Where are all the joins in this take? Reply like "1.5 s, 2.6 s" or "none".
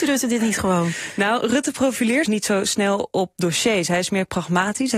2.2 s